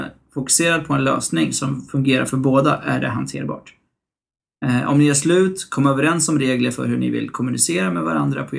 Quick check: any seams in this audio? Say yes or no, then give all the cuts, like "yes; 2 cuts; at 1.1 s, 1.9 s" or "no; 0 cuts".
no; 0 cuts